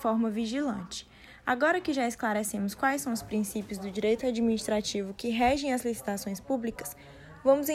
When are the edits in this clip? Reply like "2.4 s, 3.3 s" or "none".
none